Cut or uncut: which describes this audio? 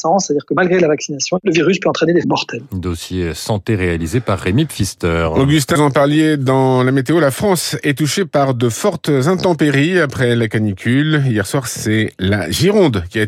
cut